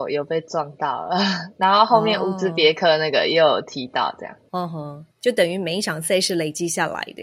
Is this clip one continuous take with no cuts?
no; 1 cut; at 5.1 s

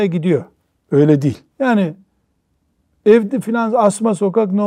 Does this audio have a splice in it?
yes; 2 cuts; at 1.5 s, 3.4 s

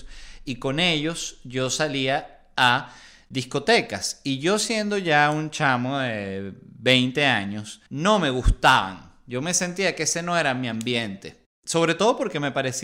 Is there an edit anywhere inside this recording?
yes; 1 cut; at 7.9 s

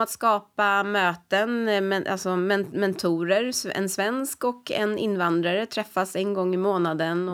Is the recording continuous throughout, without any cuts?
yes; 0 cuts

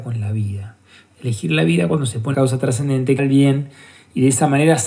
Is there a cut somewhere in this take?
yes; 2 cuts; at 2.3 s, 3.2 s

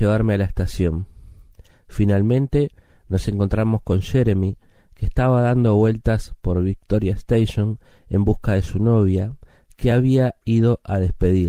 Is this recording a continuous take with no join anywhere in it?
yes; 0 cuts

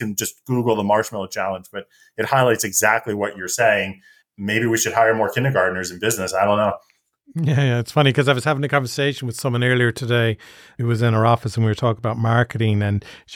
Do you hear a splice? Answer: no; 0 cuts

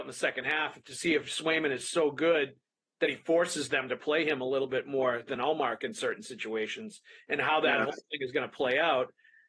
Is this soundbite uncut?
yes; 0 cuts

